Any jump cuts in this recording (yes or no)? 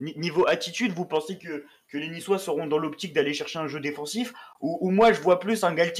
no